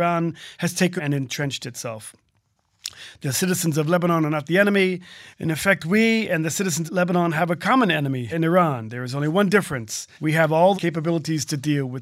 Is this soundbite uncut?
no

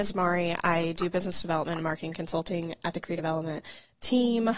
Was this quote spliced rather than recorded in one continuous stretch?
no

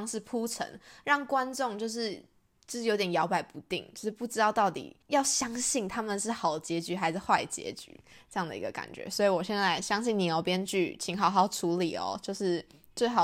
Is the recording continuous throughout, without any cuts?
no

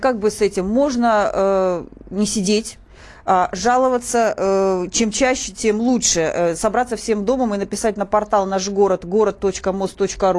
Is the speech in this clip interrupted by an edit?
no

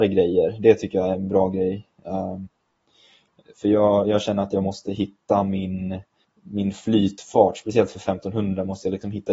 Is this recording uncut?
yes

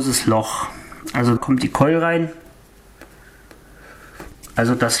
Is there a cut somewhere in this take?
yes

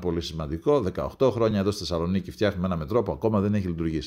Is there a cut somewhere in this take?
no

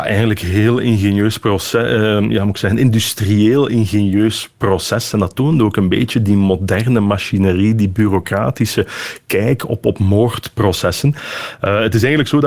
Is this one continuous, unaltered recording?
yes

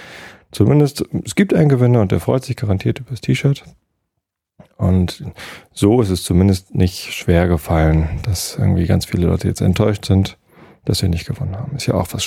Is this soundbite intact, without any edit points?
yes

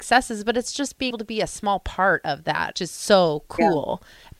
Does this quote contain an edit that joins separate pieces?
yes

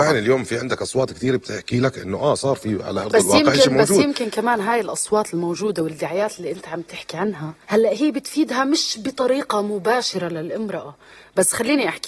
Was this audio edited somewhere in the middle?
yes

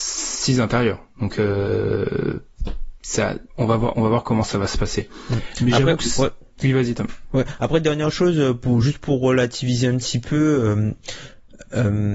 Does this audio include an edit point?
no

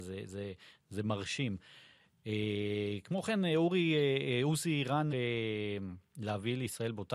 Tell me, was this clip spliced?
yes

